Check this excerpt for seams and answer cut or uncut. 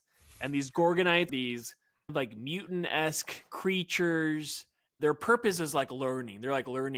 cut